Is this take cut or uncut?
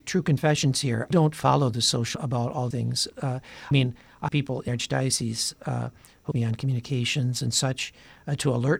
cut